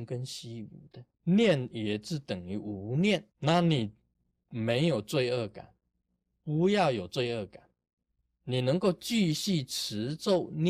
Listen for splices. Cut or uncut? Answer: cut